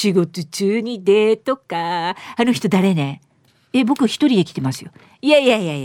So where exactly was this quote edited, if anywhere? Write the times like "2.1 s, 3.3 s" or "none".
none